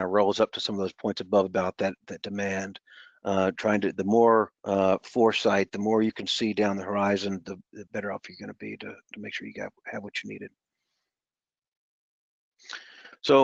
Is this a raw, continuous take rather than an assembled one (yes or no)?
no